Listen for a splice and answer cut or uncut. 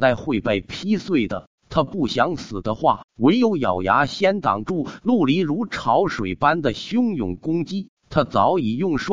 cut